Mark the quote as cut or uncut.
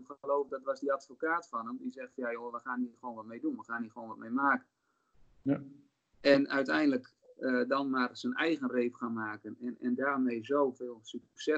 uncut